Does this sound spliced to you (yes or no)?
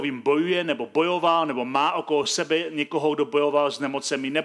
no